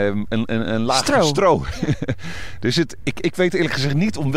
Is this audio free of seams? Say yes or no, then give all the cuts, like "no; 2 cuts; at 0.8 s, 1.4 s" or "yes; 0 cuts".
yes; 0 cuts